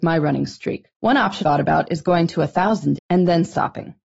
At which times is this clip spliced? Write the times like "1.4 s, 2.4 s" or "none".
0.9 s, 1.4 s, 3.0 s